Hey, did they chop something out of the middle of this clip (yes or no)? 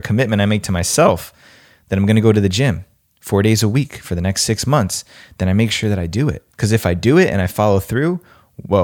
no